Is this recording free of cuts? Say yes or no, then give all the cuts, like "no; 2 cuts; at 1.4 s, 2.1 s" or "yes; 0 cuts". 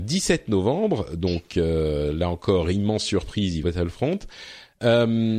no; 1 cut; at 3.6 s